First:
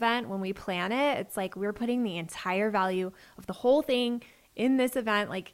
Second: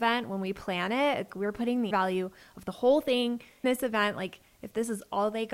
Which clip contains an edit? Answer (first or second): second